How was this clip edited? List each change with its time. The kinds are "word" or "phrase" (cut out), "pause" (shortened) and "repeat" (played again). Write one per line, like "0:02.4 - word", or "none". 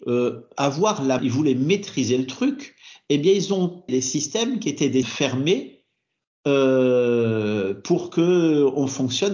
0:01.2 - word
0:03.9 - word
0:05.0 - word